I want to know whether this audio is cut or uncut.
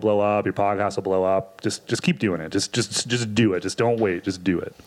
uncut